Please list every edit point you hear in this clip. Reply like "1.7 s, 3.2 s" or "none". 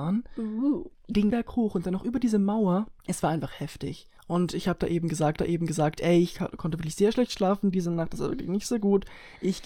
1.3 s, 3.0 s, 4.2 s, 5.4 s